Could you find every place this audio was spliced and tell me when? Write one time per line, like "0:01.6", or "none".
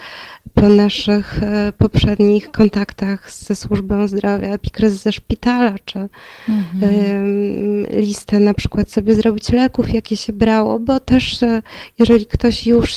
none